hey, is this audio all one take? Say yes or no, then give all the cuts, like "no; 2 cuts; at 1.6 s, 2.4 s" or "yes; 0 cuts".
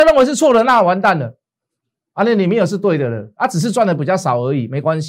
yes; 0 cuts